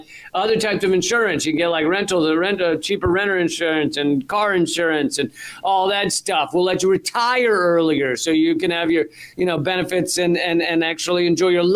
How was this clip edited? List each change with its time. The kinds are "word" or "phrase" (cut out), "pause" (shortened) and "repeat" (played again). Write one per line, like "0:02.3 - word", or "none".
none